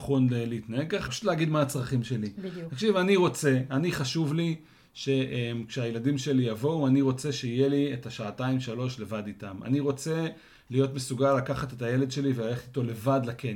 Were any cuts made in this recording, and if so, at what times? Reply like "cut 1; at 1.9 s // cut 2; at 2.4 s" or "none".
cut 1; at 1.1 s